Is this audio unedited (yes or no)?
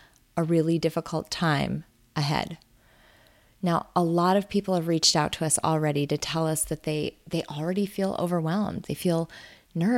yes